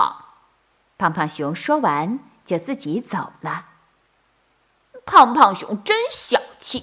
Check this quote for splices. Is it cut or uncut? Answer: uncut